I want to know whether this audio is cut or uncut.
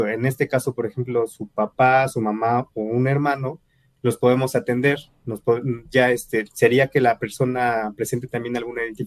uncut